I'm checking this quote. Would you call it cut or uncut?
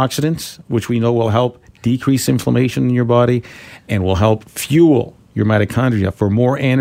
uncut